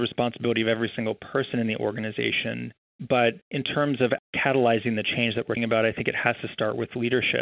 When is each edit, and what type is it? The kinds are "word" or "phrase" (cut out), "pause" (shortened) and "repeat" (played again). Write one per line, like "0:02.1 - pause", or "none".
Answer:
0:03.4 - pause
0:04.2 - word
0:05.6 - word